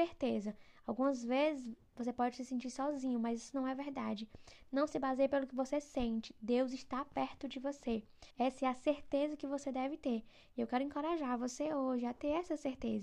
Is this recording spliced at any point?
yes; 1 cut; at 8.3 s

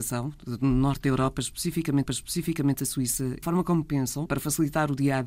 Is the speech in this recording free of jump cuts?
no; 3 cuts; at 2.1 s, 3.4 s, 4.3 s

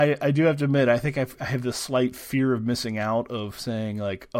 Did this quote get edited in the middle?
no; 0 cuts

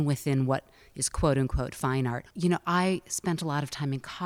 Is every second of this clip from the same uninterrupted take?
no; 1 cut; at 2.3 s

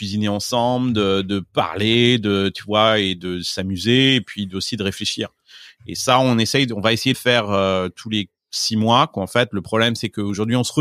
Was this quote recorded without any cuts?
no; 1 cut; at 7.1 s

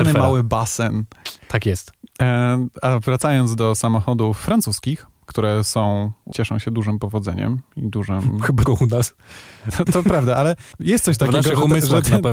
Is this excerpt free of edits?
no; 5 cuts; at 1.4 s, 6.3 s, 8.7 s, 9.9 s, 10.7 s

